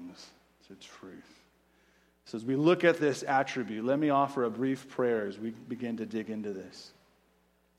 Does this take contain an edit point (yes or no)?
no